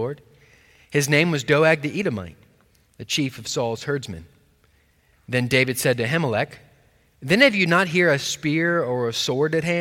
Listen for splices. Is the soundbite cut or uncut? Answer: uncut